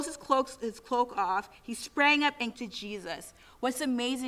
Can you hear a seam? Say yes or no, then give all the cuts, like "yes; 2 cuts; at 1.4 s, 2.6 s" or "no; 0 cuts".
yes; 1 cut; at 2.5 s